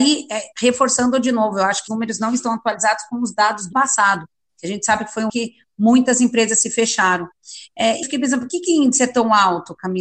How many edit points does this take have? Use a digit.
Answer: 5